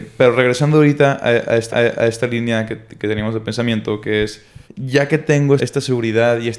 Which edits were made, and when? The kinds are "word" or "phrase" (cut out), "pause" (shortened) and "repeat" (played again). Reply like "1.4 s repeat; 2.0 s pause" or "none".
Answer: 1.7 s repeat; 4.6 s pause; 5.6 s word